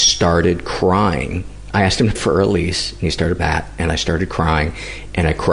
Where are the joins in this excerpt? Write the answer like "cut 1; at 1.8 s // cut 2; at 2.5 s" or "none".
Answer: cut 1; at 2.2 s // cut 2; at 3.4 s